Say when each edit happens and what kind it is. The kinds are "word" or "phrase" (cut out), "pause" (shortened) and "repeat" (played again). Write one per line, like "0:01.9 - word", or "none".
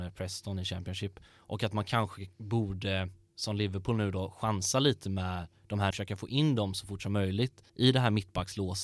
0:05.9 - word
0:07.7 - pause